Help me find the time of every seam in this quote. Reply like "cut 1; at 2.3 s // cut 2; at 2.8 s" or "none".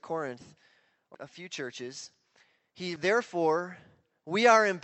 cut 1; at 1.1 s // cut 2; at 3.0 s